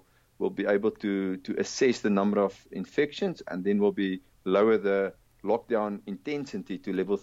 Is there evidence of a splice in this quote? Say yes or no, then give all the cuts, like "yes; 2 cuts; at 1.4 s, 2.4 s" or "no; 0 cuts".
no; 0 cuts